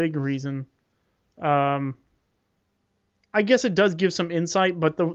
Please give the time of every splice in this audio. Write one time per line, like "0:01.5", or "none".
none